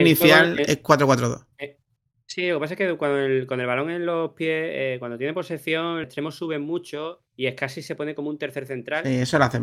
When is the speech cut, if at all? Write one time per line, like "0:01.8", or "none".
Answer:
0:06.0
0:07.3